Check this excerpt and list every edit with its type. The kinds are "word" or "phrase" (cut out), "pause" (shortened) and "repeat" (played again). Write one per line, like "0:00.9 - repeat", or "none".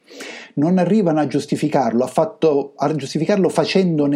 none